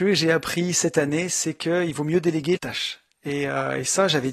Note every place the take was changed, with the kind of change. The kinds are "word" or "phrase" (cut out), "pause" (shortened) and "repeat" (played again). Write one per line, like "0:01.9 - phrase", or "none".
0:02.6 - phrase